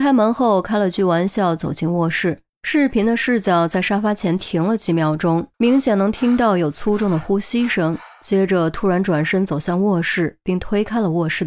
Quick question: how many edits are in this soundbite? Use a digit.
2